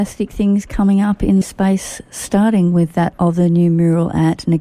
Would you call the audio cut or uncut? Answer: cut